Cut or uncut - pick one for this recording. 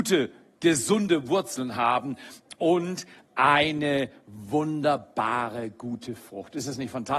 uncut